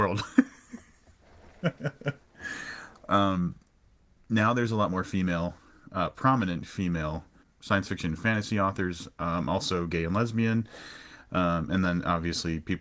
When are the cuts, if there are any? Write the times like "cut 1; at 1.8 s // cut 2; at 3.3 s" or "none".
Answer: none